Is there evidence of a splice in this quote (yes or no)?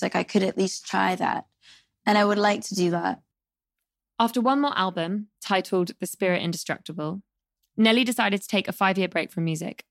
no